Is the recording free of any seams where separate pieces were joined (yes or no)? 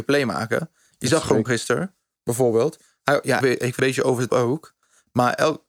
no